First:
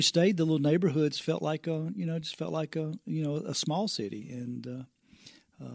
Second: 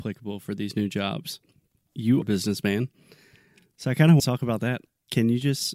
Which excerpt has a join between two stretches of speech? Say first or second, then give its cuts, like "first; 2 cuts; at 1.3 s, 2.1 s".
second; 2 cuts; at 2.2 s, 4.2 s